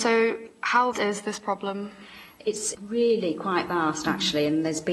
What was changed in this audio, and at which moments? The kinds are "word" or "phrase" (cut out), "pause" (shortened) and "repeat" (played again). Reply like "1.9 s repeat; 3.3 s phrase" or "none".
0.9 s word; 2.7 s word